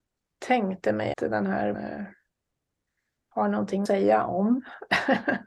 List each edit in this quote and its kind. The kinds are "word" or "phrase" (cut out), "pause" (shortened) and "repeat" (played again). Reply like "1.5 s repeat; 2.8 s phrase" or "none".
1.1 s word; 1.7 s word; 3.9 s word